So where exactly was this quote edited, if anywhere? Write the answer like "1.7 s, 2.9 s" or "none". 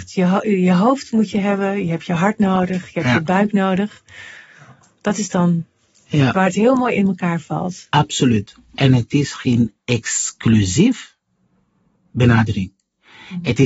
none

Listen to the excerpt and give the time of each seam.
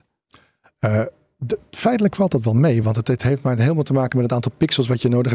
none

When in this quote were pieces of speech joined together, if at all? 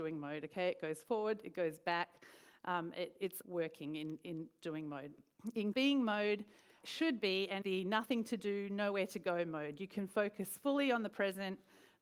3.4 s, 5.7 s, 6.8 s, 7.6 s

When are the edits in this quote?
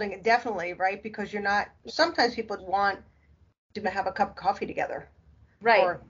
1.9 s, 2.6 s, 3.8 s

